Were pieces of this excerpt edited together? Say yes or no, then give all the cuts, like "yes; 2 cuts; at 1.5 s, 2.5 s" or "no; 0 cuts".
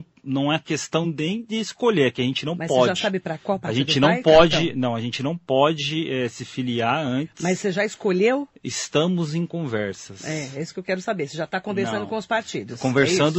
no; 0 cuts